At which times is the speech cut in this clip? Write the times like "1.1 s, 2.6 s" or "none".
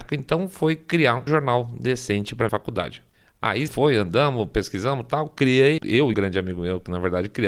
1.3 s, 2.5 s, 3.7 s, 5.8 s, 6.1 s

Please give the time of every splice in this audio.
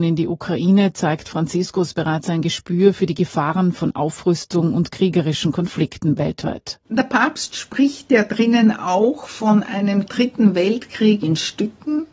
6.8 s

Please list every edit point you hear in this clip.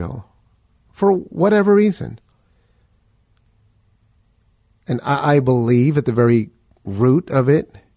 none

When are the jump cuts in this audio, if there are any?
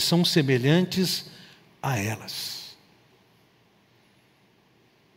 none

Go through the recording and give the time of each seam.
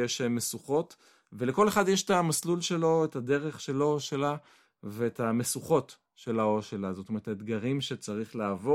none

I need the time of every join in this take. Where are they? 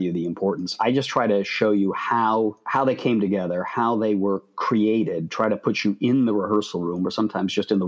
none

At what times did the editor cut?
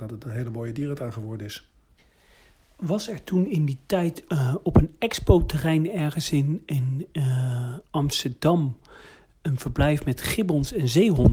4.3 s

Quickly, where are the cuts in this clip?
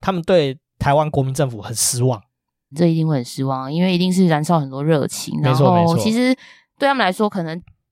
2.7 s

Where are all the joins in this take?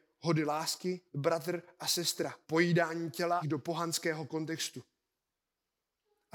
1.1 s, 2.4 s, 3.4 s

